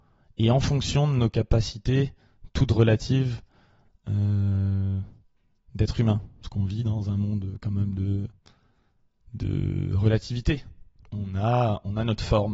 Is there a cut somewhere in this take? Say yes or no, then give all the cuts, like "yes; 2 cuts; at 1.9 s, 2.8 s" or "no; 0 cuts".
no; 0 cuts